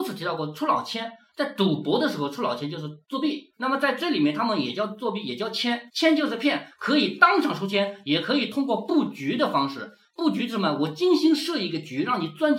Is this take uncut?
no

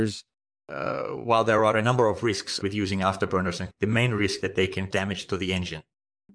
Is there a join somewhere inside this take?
yes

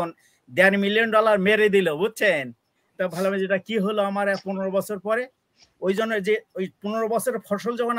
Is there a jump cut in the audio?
no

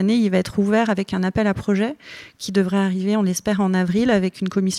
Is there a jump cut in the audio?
no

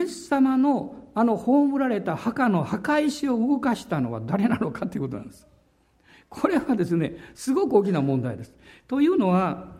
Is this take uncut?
yes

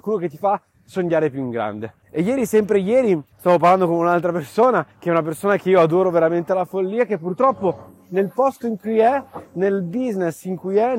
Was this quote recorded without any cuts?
no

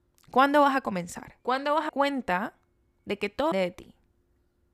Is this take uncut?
no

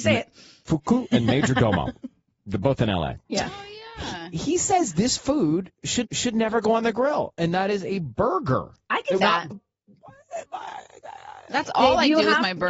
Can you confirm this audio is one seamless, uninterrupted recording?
no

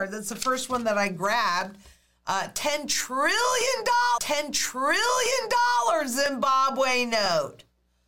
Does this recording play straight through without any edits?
no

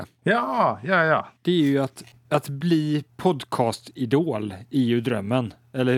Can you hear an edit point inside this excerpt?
yes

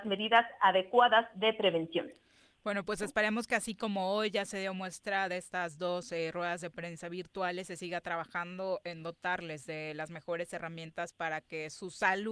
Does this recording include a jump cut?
no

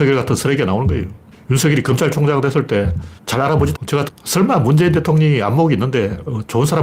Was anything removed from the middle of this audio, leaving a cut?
yes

